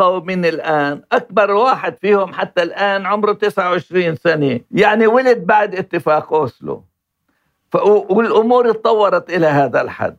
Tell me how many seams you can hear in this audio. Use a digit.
1